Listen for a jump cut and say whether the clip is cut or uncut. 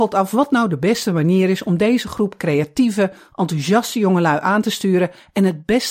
uncut